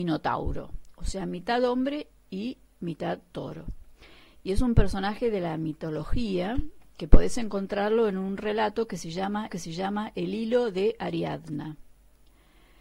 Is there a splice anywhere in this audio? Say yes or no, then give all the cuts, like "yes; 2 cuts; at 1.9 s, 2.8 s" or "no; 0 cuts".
yes; 1 cut; at 9.5 s